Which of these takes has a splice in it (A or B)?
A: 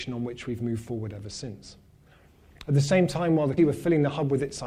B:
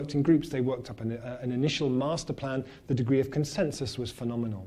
A